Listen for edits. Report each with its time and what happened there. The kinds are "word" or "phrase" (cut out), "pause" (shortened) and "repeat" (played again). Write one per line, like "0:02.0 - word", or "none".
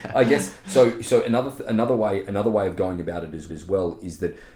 0:03.5 - repeat